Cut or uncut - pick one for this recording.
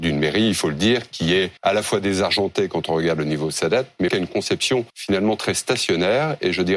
cut